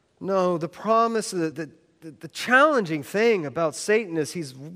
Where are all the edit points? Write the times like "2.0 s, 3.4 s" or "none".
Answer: 1.5 s